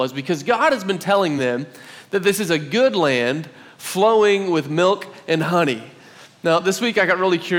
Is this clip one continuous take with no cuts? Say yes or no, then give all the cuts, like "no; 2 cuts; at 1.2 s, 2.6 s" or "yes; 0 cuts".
yes; 0 cuts